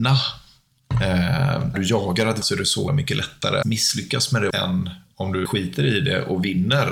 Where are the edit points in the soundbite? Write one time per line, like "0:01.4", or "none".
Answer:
0:01.7
0:02.4
0:02.9
0:03.6
0:04.5
0:05.4

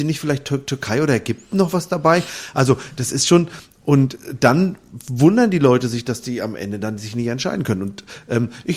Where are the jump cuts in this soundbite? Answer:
none

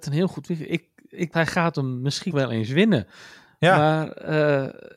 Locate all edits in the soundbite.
0:01.3
0:02.3

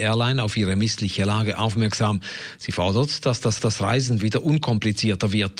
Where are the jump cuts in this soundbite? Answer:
0:03.6

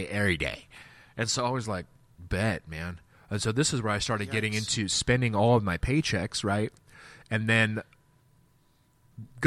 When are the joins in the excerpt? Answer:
none

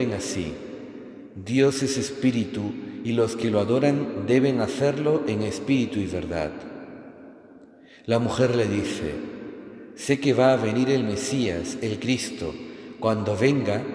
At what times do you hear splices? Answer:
none

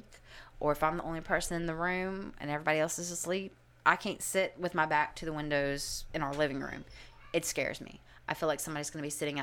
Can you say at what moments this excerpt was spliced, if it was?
none

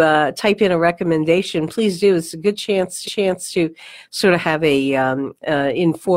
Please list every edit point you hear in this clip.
0:03.0

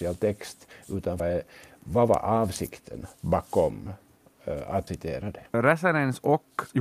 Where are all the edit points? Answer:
0:01.2
0:03.1
0:04.9

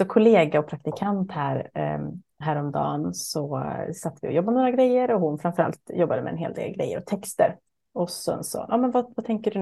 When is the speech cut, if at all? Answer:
none

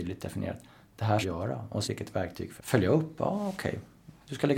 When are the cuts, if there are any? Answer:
0:01.2
0:01.8
0:02.6

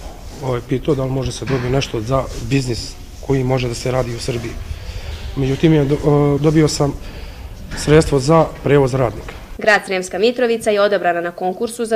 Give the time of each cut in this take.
0:06.4

